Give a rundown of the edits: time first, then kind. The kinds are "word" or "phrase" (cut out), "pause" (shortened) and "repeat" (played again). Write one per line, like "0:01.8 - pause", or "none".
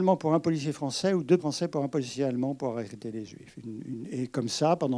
0:01.4 - word